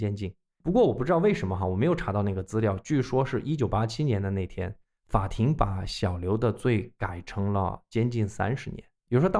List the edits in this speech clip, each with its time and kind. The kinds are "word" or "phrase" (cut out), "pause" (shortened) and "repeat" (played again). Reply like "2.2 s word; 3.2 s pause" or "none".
none